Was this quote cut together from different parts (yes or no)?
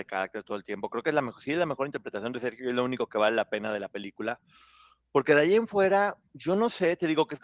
no